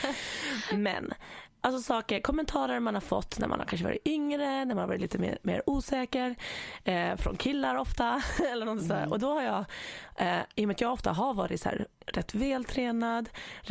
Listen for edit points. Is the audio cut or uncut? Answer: uncut